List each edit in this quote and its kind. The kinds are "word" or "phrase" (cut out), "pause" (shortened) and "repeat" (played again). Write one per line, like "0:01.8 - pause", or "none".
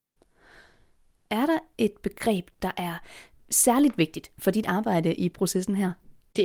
none